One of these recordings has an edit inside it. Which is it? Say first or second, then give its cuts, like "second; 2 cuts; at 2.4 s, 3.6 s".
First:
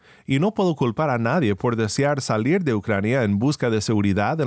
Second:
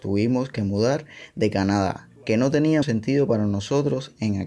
second; 1 cut; at 2.8 s